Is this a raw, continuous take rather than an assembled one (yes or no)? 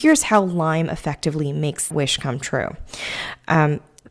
no